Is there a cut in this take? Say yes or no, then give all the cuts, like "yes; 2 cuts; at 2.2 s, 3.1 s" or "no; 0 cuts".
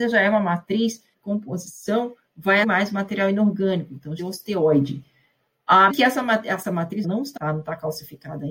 yes; 6 cuts; at 1.1 s, 2.6 s, 4.2 s, 5.9 s, 7.0 s, 7.4 s